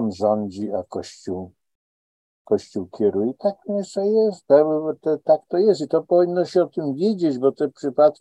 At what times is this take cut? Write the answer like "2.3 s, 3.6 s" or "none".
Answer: none